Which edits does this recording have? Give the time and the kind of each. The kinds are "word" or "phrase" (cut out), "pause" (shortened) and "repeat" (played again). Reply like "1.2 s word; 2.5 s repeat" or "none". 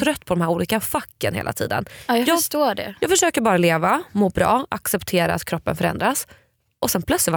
none